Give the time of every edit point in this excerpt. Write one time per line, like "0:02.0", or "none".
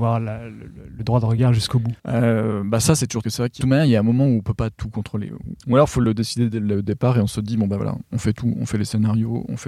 0:02.0
0:03.2
0:03.6
0:05.6